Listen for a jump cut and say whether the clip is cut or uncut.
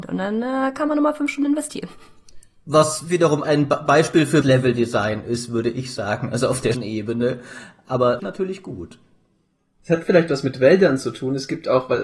cut